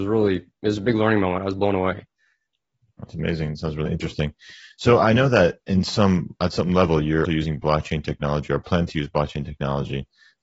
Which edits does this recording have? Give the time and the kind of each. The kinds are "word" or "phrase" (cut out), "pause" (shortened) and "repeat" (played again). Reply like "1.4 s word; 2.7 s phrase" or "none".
7.2 s word

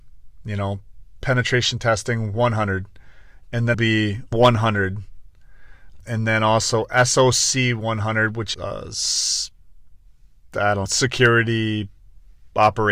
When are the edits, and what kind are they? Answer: 3.7 s word; 4.3 s word; 6.0 s word; 8.5 s word; 10.9 s word

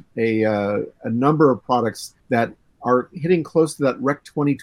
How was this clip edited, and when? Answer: 2.2 s pause

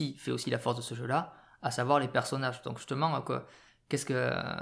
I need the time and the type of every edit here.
none

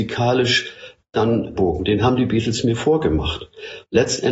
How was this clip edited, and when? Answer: 1.6 s word

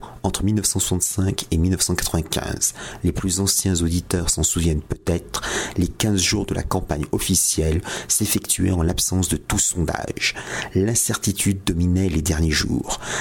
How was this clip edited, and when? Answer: none

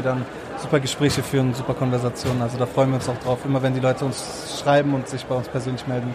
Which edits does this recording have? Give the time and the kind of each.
none

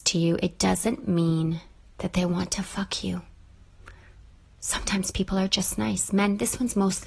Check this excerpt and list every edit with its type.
none

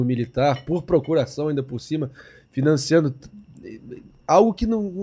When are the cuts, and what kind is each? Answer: none

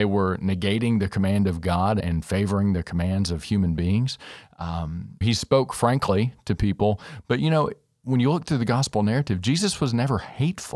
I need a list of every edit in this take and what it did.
2.0 s word; 5.2 s word

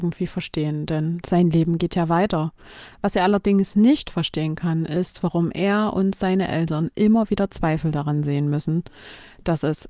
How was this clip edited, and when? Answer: none

